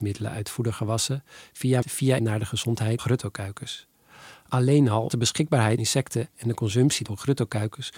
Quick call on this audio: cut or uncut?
cut